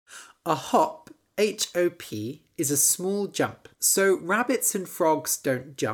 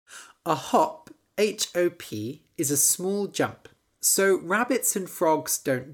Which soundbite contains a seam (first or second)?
first